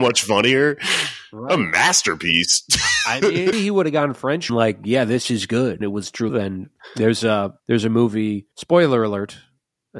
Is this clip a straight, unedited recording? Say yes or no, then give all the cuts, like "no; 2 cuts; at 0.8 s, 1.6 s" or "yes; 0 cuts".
no; 6 cuts; at 3.5 s, 4.5 s, 5.8 s, 6.3 s, 7.6 s, 8.5 s